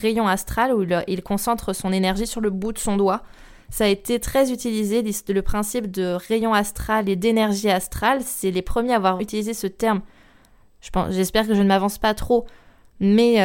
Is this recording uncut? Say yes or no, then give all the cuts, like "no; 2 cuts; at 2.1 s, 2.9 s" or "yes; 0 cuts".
no; 1 cut; at 9.2 s